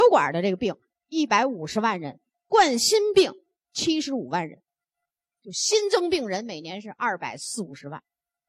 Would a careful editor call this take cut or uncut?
uncut